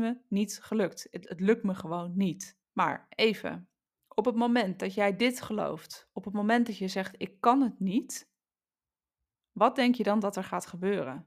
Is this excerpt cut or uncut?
cut